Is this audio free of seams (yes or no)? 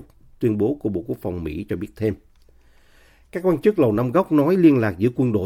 yes